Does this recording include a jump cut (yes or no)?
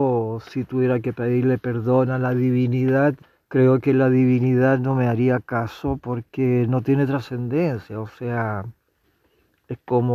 yes